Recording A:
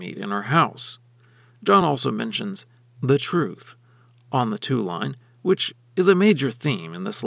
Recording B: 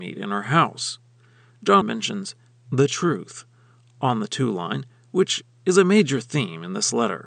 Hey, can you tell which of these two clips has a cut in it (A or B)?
B